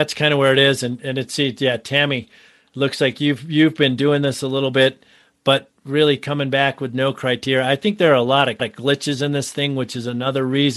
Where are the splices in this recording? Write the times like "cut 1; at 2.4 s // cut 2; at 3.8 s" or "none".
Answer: cut 1; at 8.6 s